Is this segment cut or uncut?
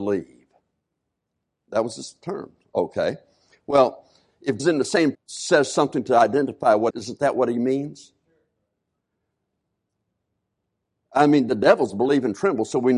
cut